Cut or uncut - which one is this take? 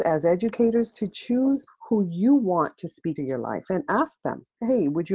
cut